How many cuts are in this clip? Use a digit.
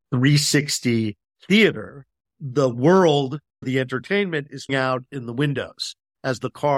3